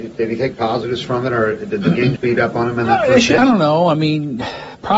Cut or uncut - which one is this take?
cut